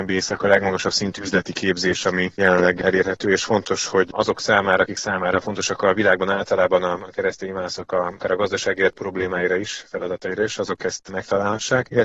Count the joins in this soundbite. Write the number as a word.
zero